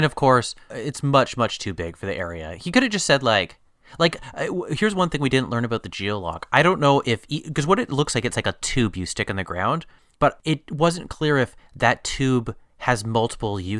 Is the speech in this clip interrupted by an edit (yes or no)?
no